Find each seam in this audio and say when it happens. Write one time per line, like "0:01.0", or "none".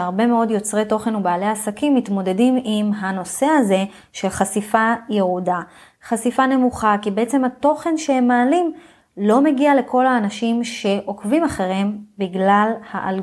none